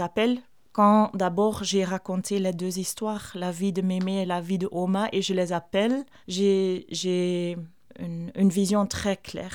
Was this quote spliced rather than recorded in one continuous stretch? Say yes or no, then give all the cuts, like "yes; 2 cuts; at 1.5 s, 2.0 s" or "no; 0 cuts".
no; 0 cuts